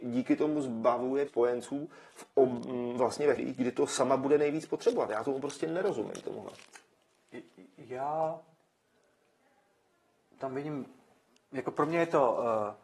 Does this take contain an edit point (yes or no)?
yes